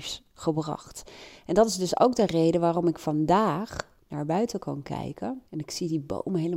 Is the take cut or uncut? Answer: cut